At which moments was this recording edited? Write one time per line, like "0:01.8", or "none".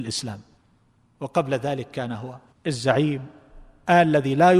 none